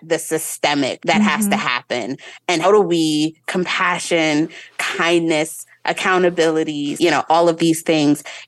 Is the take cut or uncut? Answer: cut